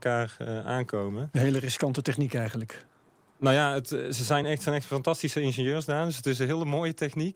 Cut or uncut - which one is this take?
uncut